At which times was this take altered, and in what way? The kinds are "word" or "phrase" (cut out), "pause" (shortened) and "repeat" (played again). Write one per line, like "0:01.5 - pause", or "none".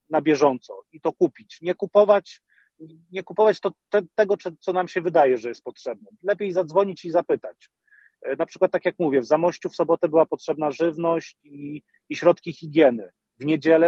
none

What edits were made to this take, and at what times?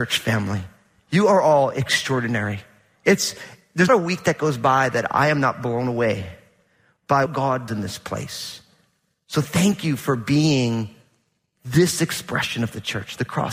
0:03.9 - word
0:07.3 - word
0:07.7 - word

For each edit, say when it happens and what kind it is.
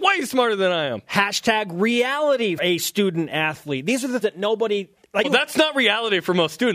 0:02.6 - word
0:04.2 - word
0:05.2 - word

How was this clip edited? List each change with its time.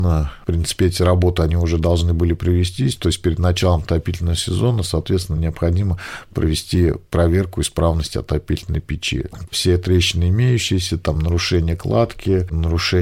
none

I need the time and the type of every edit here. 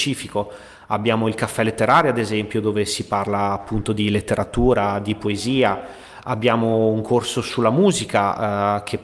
none

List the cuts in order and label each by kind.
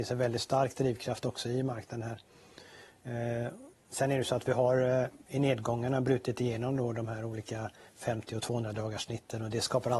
none

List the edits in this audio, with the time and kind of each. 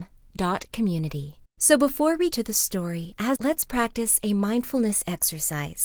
0:01.4 - pause
0:02.3 - word
0:03.4 - word

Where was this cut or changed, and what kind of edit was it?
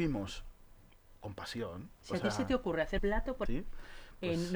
0:02.0 - pause
0:03.0 - word
0:03.5 - word

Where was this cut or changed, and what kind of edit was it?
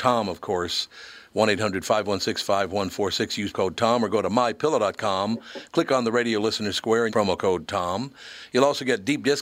0:03.5 - word
0:07.1 - word

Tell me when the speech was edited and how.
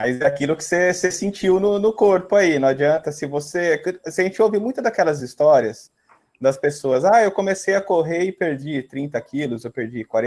none

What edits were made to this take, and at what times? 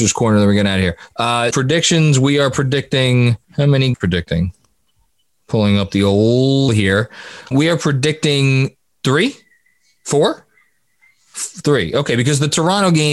0:01.5 - word
0:03.4 - pause
0:03.9 - phrase
0:04.9 - pause
0:06.7 - word
0:07.5 - word
0:09.0 - word

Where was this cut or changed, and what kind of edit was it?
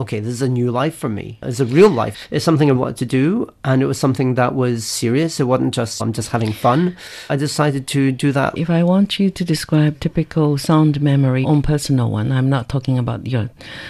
0:02.7 - word
0:06.0 - phrase
0:07.3 - word
0:08.6 - phrase
0:09.9 - word
0:11.4 - word

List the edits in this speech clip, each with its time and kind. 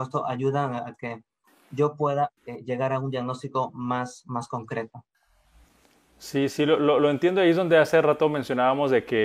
0:02.4 - pause

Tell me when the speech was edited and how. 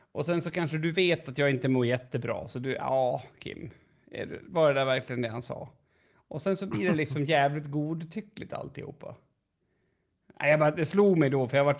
none

